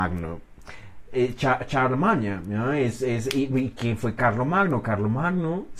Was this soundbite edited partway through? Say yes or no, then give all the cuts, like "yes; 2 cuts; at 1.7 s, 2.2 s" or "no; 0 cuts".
no; 0 cuts